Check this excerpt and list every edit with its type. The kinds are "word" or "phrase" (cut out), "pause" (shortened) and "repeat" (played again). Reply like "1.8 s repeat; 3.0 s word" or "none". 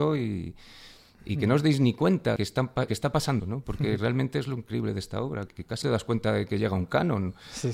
2.4 s word; 2.9 s word; 3.4 s word; 5.5 s word; 5.8 s word